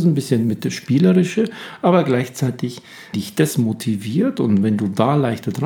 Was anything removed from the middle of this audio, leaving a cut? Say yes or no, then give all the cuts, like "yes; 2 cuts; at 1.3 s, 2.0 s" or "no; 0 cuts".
yes; 1 cut; at 3.1 s